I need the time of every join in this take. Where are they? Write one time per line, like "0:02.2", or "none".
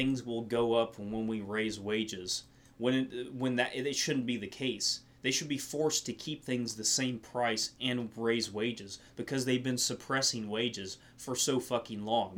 none